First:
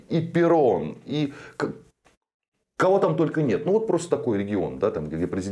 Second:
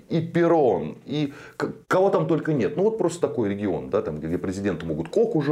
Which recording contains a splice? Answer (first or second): second